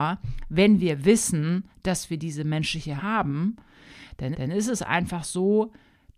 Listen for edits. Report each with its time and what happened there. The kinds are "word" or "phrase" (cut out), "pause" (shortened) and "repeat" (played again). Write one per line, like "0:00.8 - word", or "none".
0:03.0 - word
0:04.3 - repeat